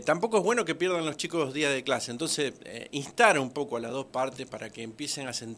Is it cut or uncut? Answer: uncut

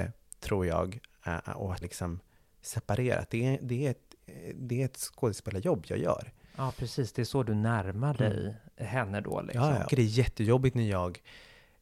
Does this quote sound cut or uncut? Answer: cut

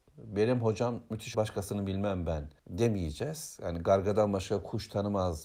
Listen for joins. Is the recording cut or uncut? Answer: cut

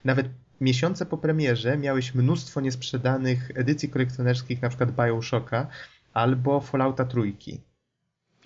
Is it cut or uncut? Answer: uncut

